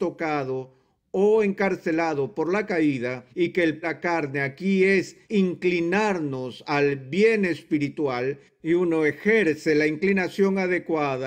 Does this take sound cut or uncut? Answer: cut